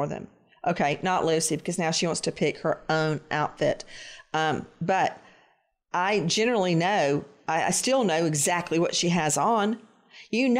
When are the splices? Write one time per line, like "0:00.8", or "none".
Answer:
none